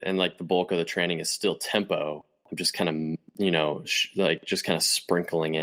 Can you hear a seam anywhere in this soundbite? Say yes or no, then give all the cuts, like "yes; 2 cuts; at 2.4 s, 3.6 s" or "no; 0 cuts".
no; 0 cuts